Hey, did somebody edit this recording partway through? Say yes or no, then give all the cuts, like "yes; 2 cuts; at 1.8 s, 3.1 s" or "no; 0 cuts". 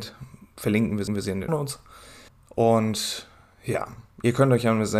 yes; 3 cuts; at 1.1 s, 1.5 s, 2.3 s